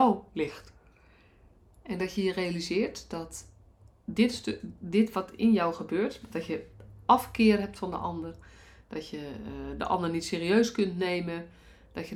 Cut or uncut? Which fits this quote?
uncut